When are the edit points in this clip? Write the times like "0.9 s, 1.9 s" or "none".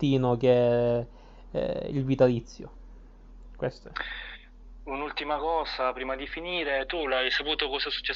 none